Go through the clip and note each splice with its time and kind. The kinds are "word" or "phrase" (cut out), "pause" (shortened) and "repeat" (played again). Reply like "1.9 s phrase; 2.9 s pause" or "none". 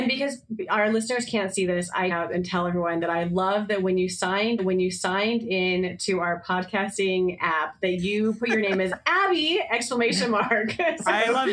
2.1 s phrase; 4.6 s repeat